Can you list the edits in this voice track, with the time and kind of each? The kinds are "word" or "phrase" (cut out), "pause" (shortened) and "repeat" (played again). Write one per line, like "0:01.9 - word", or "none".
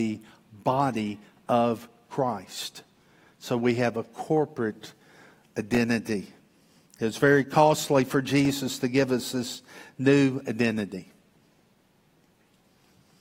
none